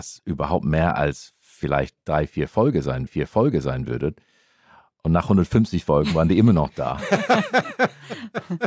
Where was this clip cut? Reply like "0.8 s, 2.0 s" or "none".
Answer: 3.1 s